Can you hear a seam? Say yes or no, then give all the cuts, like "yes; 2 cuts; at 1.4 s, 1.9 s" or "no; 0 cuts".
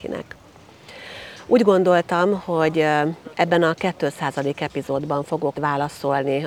yes; 1 cut; at 5.5 s